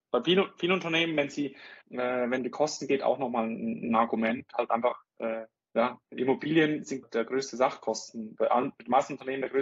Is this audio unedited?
no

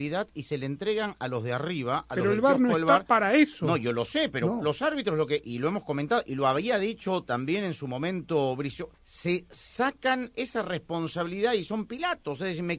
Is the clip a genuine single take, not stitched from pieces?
no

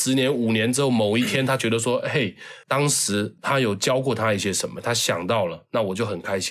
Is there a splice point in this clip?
no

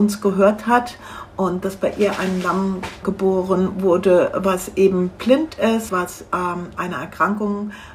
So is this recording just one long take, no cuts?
no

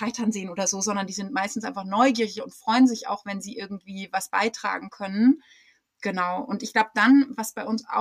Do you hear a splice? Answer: no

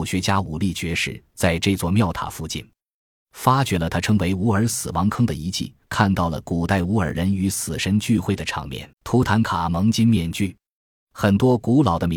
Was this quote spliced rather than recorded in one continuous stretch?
yes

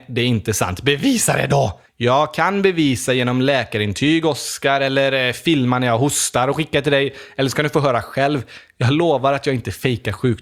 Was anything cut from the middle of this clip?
yes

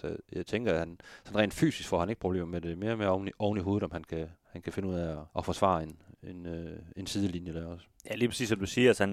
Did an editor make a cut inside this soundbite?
yes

